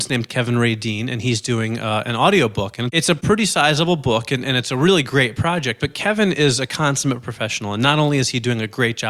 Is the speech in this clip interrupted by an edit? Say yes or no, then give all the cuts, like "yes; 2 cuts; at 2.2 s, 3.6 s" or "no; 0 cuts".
no; 0 cuts